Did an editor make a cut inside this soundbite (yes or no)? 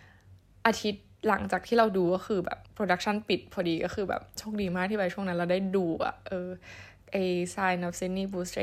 yes